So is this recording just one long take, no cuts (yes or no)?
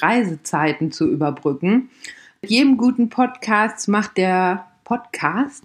yes